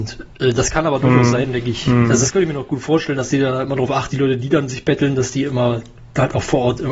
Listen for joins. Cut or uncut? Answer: cut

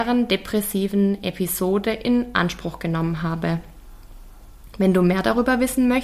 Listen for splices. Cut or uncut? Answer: uncut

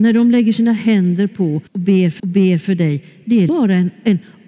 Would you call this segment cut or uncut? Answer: cut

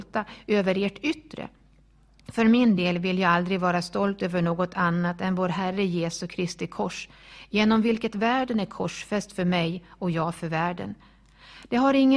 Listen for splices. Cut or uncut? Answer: uncut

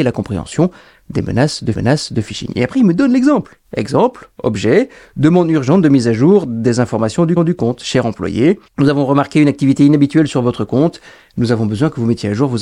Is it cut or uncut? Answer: cut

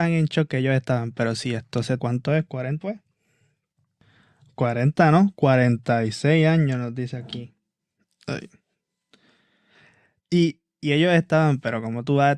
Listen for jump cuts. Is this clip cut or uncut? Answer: cut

